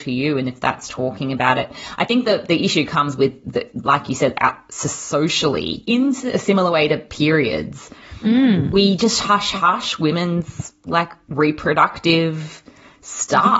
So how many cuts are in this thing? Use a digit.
0